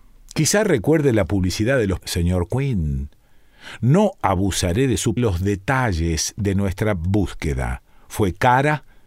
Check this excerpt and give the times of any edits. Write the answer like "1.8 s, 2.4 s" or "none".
2.0 s, 5.2 s